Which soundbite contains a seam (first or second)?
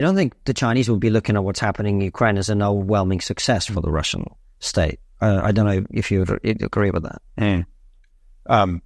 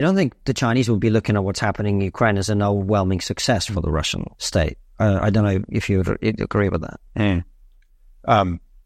second